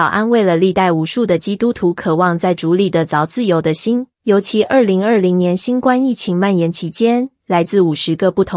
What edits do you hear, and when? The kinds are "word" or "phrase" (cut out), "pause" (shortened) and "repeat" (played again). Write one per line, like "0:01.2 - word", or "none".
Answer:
0:04.1 - pause
0:07.4 - pause